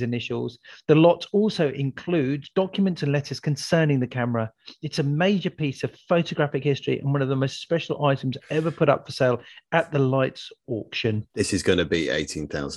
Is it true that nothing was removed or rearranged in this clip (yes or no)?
no